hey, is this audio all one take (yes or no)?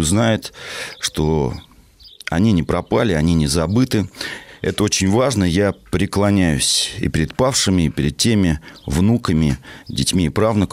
yes